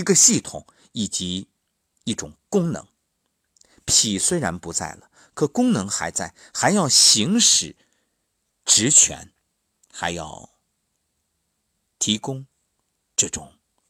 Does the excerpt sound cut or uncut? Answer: uncut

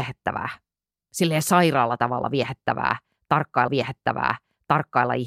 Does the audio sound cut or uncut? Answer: cut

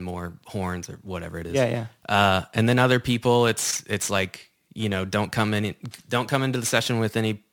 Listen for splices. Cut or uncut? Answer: uncut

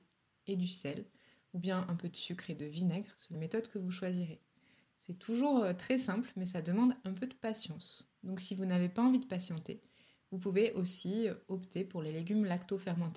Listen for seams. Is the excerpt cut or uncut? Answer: cut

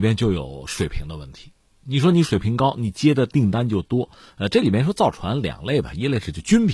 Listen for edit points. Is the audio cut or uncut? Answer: uncut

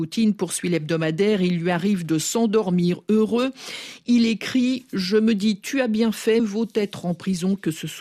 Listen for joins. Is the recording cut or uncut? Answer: cut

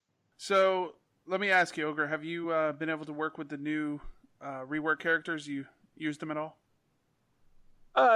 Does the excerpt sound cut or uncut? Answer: uncut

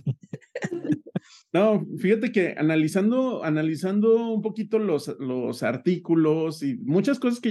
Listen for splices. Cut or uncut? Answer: uncut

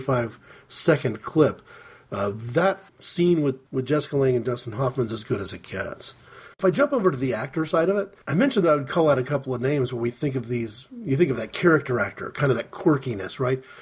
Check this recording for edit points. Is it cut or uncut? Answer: cut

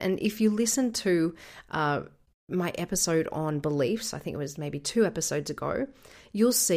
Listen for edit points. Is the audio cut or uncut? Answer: uncut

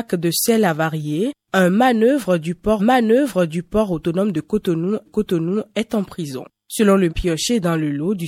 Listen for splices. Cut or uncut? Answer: cut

